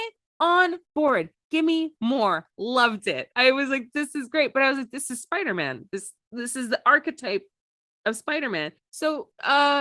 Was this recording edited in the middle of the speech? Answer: no; 0 cuts

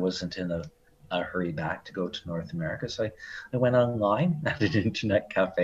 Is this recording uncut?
yes; 0 cuts

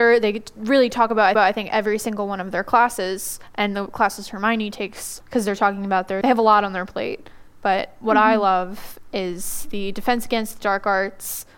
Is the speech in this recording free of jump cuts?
no; 3 cuts; at 1.4 s, 5.2 s, 6.2 s

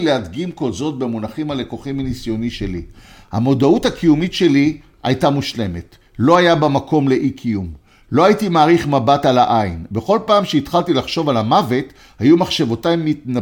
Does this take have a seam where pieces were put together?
no; 0 cuts

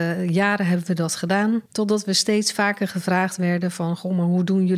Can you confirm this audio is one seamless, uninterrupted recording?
no; 1 cut; at 1.7 s

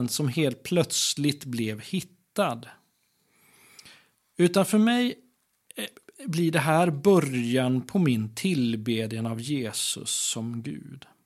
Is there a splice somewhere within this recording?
no; 0 cuts

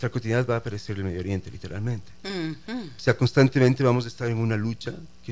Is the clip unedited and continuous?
yes; 0 cuts

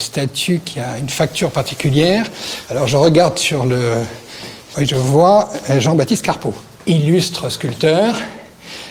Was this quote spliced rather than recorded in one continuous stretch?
no; 0 cuts

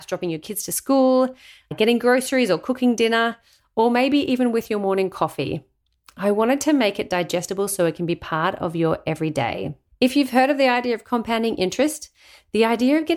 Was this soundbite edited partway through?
no; 0 cuts

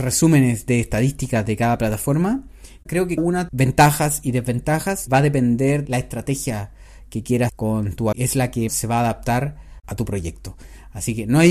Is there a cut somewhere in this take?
yes; 7 cuts; at 3.2 s, 3.5 s, 5.1 s, 5.9 s, 7.5 s, 8.1 s, 8.7 s

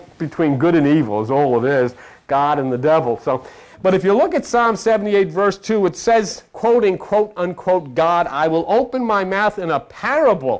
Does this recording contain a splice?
yes; 1 cut; at 3.7 s

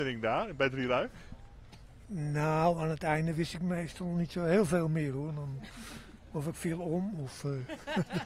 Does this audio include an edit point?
no; 0 cuts

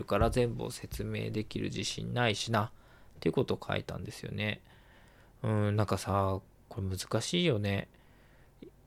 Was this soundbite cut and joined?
no; 0 cuts

